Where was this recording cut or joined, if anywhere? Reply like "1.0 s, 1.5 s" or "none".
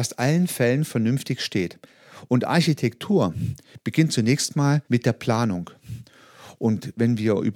4.8 s